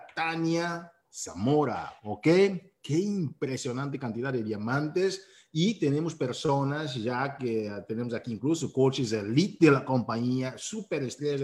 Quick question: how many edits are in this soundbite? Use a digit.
0